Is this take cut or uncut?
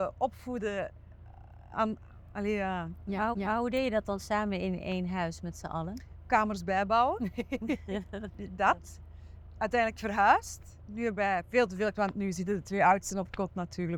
cut